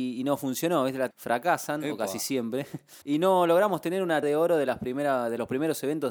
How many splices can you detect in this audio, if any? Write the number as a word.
three